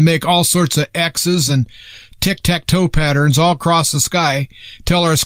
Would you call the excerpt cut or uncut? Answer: uncut